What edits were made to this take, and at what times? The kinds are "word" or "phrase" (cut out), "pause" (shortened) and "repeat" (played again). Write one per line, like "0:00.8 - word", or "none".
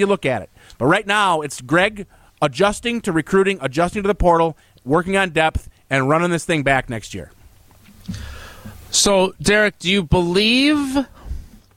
none